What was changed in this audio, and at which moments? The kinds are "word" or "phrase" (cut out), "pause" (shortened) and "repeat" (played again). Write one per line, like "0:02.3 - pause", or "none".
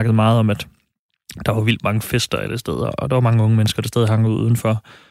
none